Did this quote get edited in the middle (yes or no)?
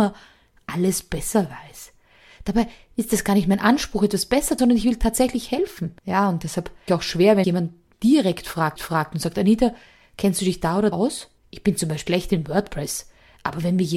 yes